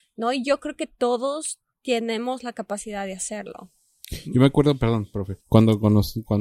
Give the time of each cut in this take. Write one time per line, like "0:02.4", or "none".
0:05.4